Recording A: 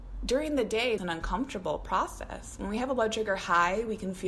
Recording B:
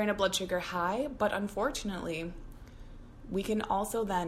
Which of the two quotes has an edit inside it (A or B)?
A